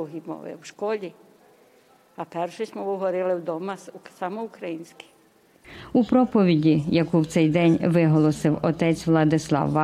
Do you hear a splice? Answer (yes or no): no